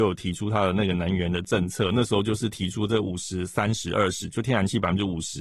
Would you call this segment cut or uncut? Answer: uncut